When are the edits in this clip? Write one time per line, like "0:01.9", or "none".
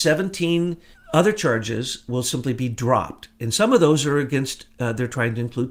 0:00.9